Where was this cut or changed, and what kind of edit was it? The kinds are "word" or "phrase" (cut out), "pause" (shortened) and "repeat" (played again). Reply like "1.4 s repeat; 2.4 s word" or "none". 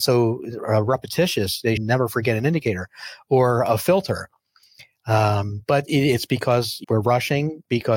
1.8 s word; 6.8 s word